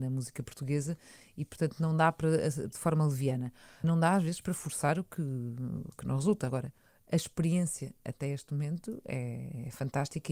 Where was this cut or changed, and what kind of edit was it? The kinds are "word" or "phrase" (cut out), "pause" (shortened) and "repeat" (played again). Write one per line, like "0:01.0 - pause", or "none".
0:02.7 - phrase
0:03.8 - phrase